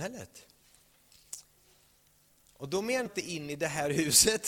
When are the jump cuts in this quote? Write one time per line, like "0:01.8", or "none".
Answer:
0:03.1